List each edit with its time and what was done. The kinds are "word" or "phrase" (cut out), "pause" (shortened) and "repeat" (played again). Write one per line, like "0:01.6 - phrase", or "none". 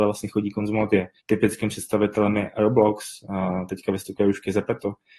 0:01.2 - pause
0:03.7 - word